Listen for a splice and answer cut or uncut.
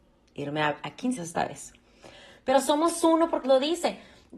cut